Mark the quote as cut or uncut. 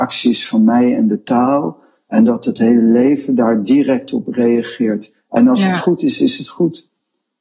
uncut